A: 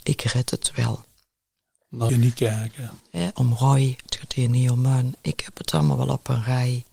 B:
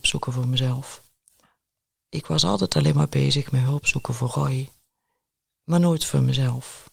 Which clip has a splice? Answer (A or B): A